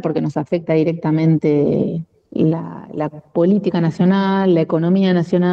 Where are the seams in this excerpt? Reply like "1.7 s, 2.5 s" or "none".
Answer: none